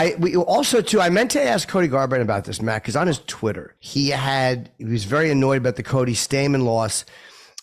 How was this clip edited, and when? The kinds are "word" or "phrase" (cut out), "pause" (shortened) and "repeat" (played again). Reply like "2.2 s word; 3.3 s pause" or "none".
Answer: 3.8 s pause